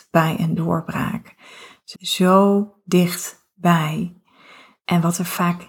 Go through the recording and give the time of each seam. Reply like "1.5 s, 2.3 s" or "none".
1.9 s